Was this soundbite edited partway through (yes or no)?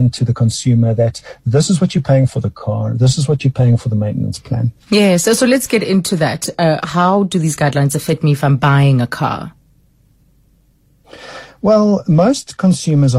yes